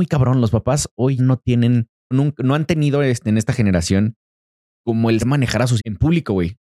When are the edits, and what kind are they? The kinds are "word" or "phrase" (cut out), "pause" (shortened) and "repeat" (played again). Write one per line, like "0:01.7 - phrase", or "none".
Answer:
0:01.2 - word
0:02.1 - word
0:05.2 - word
0:05.8 - word